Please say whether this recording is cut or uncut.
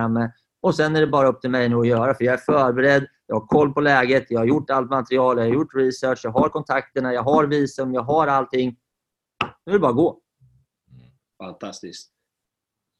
uncut